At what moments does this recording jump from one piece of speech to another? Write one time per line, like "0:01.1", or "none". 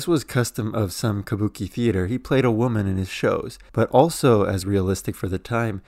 0:04.6